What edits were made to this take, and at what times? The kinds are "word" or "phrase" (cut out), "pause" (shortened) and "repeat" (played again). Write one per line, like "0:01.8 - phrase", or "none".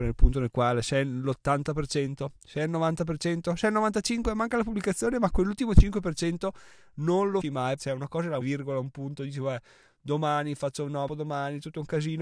0:07.4 - word
0:07.8 - word
0:08.4 - word
0:11.1 - word